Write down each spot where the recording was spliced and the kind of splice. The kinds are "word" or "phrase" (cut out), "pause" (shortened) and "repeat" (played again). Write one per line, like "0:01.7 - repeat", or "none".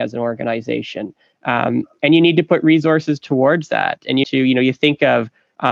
0:04.2 - word